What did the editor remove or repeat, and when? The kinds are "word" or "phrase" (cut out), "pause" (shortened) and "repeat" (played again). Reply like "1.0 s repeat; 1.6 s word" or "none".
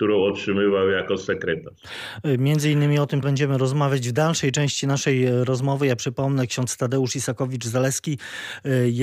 3.2 s word